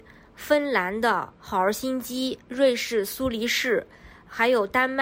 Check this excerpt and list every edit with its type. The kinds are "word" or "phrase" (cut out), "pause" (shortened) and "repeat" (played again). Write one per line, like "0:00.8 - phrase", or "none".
0:01.4 - pause